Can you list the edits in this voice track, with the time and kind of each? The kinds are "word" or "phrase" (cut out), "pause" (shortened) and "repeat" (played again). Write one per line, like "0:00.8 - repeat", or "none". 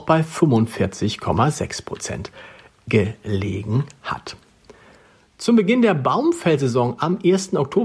none